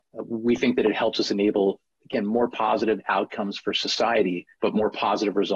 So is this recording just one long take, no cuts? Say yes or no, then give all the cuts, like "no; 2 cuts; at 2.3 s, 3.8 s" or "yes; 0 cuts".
no; 1 cut; at 4.5 s